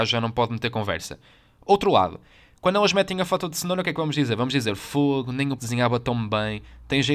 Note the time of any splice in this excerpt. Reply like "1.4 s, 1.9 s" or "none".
5.6 s